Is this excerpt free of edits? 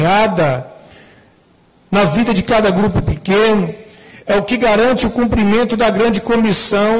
yes; 0 cuts

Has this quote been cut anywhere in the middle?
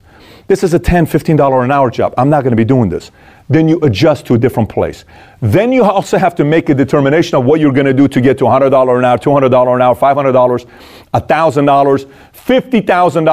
no; 0 cuts

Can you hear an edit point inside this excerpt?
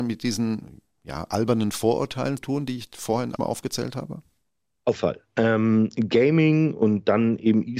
yes; 3 cuts; at 2.4 s, 3.4 s, 4.9 s

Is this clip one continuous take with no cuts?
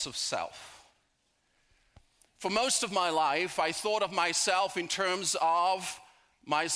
yes; 0 cuts

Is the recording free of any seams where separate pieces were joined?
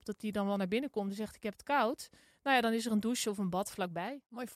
yes; 0 cuts

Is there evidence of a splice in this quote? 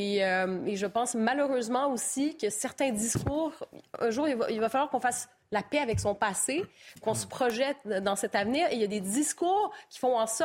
no; 0 cuts

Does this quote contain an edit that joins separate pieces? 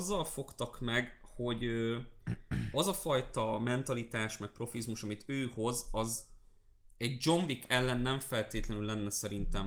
no; 0 cuts

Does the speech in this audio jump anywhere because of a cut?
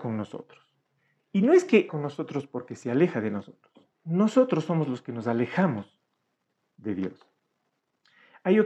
yes; 3 cuts; at 1.0 s, 1.9 s, 3.9 s

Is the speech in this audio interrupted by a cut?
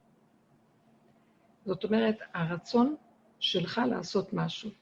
no; 0 cuts

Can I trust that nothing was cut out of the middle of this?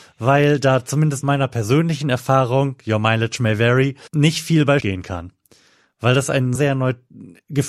no; 4 cuts; at 1.2 s, 4.1 s, 4.8 s, 6.5 s

